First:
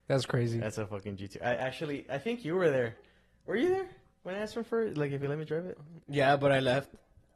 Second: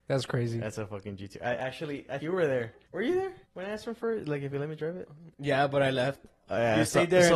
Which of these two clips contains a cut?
second; 4 cuts; at 2.2 s, 2.8 s, 3.4 s, 6.4 s

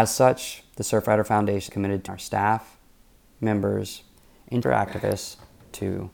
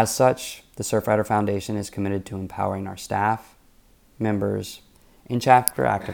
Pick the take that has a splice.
first; 3 cuts; at 1.7 s, 2.1 s, 4.6 s

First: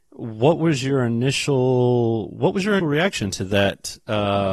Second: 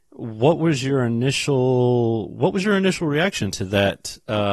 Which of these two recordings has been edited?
first; 1 cut; at 2.8 s

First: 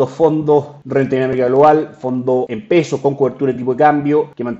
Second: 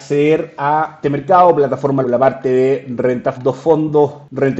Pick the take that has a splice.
second; 3 cuts; at 1.0 s, 2.0 s, 3.3 s

